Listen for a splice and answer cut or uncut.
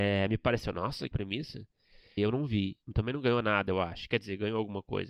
cut